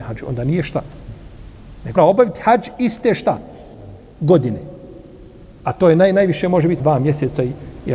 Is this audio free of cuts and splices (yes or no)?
no